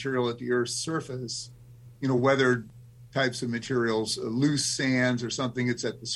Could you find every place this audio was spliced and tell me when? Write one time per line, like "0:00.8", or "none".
none